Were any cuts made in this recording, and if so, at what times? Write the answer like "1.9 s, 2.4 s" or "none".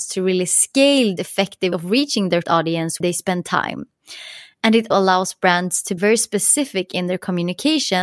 1.2 s, 1.7 s, 2.4 s, 3.0 s, 4.9 s, 6.0 s